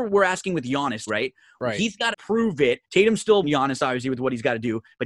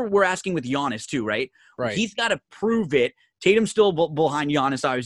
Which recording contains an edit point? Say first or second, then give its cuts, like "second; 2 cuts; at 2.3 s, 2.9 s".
first; 4 cuts; at 1.1 s, 2.1 s, 2.8 s, 3.4 s